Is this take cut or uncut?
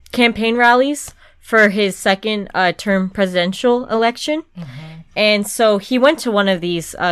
uncut